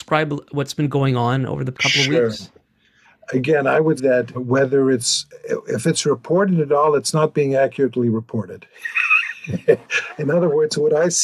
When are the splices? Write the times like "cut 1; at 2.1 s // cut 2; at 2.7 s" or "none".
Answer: cut 1; at 1.7 s // cut 2; at 4.0 s // cut 3; at 4.3 s